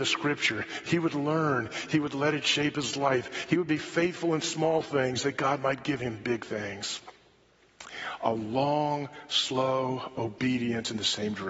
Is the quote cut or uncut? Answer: uncut